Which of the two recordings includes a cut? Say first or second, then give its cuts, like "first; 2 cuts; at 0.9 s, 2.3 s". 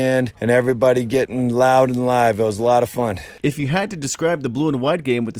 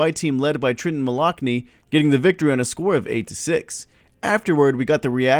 first; 1 cut; at 3.4 s